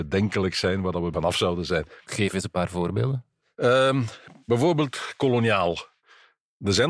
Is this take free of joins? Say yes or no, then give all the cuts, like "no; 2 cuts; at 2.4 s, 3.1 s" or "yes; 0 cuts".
no; 1 cut; at 1.1 s